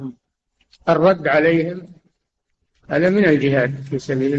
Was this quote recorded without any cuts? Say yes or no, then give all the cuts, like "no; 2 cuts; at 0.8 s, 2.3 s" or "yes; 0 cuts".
yes; 0 cuts